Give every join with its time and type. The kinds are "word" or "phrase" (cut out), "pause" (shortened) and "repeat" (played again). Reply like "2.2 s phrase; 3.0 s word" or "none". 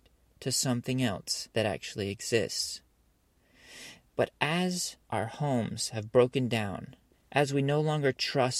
1.5 s pause; 5.0 s pause; 7.1 s pause